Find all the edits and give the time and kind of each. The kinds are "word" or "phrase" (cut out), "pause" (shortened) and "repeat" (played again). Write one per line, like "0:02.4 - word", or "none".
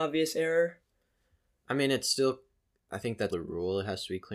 0:03.3 - word